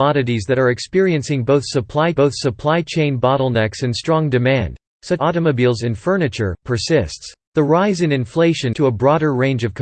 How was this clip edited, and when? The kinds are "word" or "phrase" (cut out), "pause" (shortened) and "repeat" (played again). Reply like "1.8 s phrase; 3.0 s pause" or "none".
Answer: 2.2 s repeat; 5.2 s word; 7.4 s pause; 8.7 s word